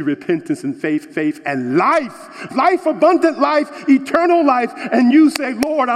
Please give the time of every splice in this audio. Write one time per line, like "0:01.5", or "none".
0:01.1
0:02.5